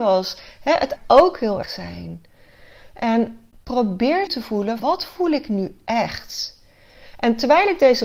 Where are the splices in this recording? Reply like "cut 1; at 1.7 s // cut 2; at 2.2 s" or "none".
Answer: cut 1; at 1.0 s // cut 2; at 1.6 s // cut 3; at 4.3 s // cut 4; at 4.8 s